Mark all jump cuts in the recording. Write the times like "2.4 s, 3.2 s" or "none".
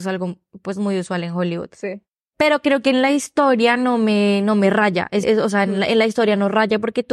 5.2 s